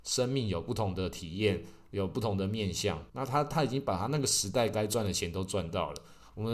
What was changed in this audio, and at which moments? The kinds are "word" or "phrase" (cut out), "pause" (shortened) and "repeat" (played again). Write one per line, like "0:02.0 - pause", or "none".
0:03.1 - pause

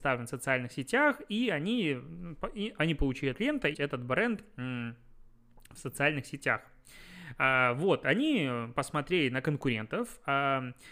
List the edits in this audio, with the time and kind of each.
0:03.3 - word
0:03.7 - phrase

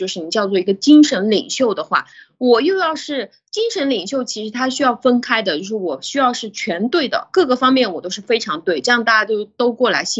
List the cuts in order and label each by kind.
none

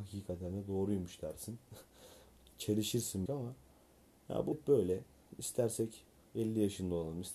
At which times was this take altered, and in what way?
0:02.5 - word
0:03.3 - word
0:04.5 - word

